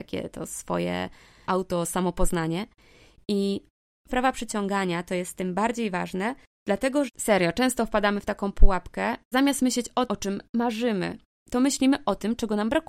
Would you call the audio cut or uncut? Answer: cut